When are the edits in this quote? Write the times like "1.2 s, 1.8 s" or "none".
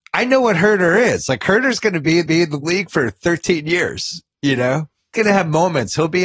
2.3 s, 5.1 s